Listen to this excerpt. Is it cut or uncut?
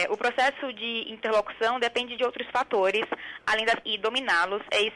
cut